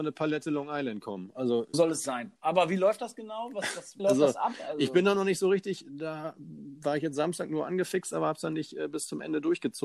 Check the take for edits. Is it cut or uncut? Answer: cut